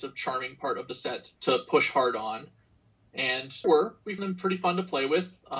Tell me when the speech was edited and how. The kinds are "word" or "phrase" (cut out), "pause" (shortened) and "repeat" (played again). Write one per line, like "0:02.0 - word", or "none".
0:01.4 - pause
0:03.6 - word
0:04.2 - word